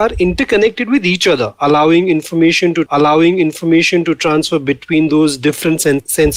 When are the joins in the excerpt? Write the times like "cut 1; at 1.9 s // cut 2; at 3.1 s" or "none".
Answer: cut 1; at 2.9 s